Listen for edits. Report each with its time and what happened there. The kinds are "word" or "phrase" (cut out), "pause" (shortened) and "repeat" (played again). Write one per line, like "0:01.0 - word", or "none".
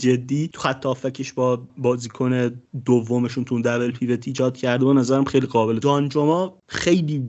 0:05.8 - word